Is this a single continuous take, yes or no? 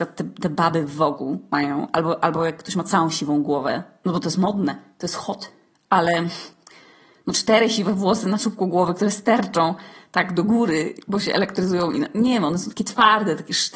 yes